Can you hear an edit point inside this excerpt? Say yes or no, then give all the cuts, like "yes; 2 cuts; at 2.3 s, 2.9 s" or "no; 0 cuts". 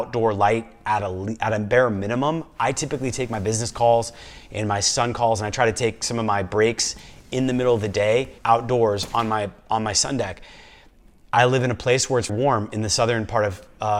yes; 2 cuts; at 8.4 s, 12.3 s